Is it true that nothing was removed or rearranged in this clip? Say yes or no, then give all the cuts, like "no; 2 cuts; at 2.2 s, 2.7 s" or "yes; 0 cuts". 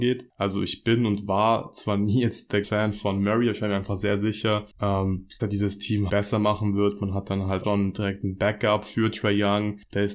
no; 4 cuts; at 2.6 s, 5.4 s, 6.1 s, 7.6 s